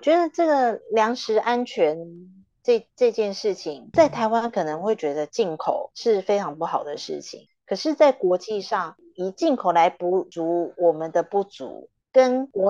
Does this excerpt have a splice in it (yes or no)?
yes